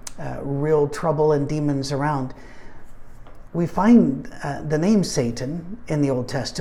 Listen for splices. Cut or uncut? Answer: uncut